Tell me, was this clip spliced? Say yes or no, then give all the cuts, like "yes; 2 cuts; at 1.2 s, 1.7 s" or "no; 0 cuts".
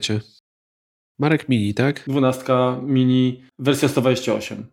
yes; 1 cut; at 3.5 s